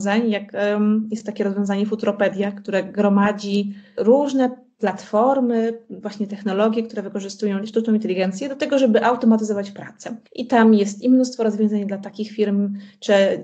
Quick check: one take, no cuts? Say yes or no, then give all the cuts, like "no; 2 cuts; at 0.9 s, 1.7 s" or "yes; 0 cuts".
no; 1 cut; at 10.3 s